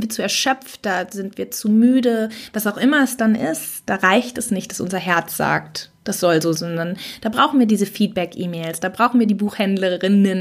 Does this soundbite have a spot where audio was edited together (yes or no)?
yes